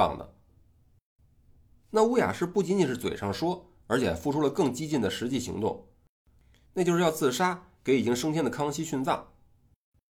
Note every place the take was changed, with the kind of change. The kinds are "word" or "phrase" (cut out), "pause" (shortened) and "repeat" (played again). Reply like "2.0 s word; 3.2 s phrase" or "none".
none